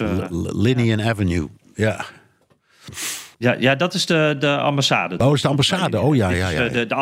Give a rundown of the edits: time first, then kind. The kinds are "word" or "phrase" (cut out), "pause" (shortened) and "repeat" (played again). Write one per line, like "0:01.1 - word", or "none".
0:03.3 - pause

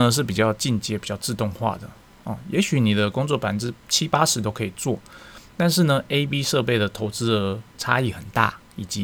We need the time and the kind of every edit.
none

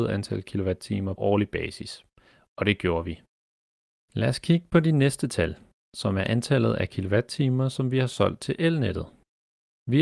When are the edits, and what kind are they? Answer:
0:01.2 - word

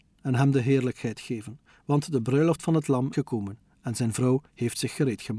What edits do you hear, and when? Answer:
0:03.1 - word

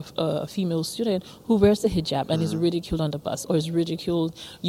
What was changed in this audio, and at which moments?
none

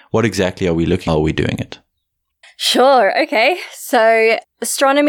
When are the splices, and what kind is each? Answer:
0:01.1 - phrase

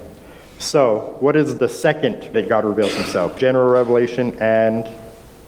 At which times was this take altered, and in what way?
0:01.6 - word
0:02.3 - word
0:03.4 - word

